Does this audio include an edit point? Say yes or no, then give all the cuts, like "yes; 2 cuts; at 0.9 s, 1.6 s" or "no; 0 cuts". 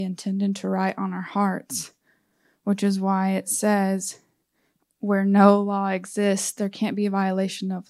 no; 0 cuts